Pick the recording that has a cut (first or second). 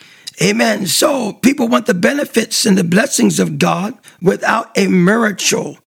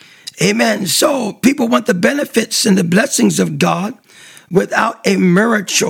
first